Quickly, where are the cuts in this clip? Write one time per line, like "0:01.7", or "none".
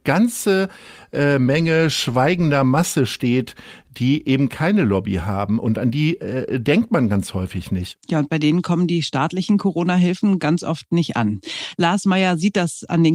0:08.0